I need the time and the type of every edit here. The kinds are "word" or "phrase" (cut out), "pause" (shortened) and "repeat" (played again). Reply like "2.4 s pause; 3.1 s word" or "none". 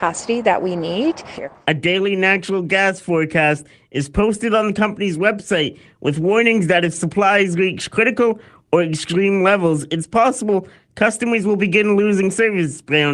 none

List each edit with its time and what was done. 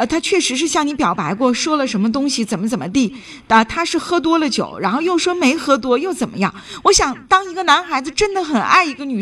none

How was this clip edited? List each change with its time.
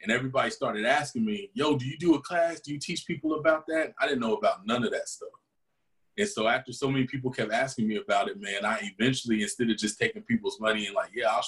none

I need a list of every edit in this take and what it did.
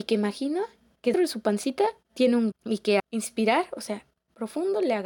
1.1 s word; 2.5 s word; 3.0 s word; 4.2 s word

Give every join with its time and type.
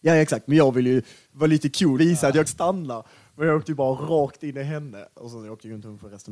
2.0 s word; 2.5 s word

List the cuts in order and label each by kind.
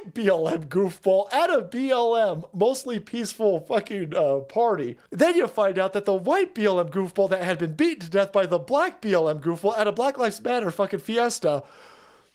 5.1 s pause

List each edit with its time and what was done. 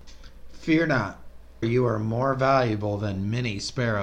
1.6 s word

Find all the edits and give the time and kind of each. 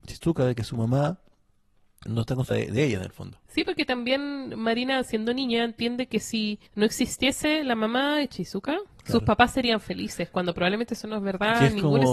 2.1 s word; 2.5 s phrase; 3.5 s pause; 6.7 s pause; 9.0 s pause

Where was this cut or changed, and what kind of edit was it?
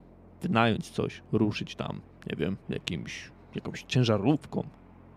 2.6 s pause

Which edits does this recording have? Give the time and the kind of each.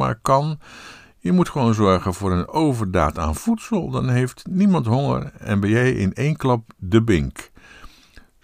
none

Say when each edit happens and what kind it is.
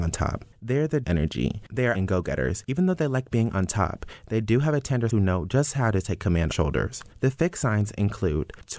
1.0 s phrase; 1.9 s word; 5.1 s phrase; 6.5 s phrase

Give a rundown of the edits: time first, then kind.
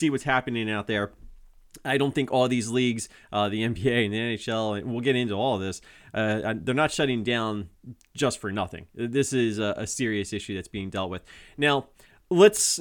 none

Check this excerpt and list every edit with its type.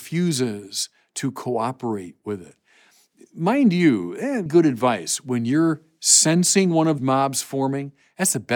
4.5 s word; 7.0 s word

